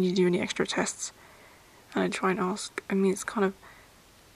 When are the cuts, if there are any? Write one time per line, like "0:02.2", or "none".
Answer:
0:02.1